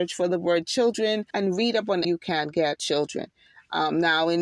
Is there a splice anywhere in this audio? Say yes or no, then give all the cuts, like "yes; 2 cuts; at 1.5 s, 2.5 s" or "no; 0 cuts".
yes; 3 cuts; at 1.3 s, 2.0 s, 2.8 s